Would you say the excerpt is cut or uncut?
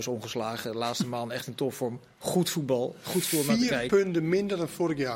uncut